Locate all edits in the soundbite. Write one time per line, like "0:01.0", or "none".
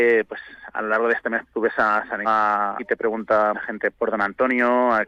0:01.4
0:02.2
0:02.8
0:03.5
0:03.9